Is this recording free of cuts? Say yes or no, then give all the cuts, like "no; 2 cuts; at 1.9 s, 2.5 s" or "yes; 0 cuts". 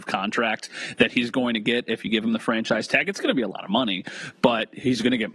yes; 0 cuts